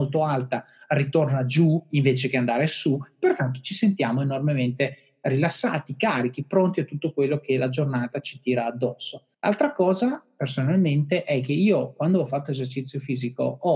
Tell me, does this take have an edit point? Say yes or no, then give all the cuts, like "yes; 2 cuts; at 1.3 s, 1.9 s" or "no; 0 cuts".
yes; 1 cut; at 9.3 s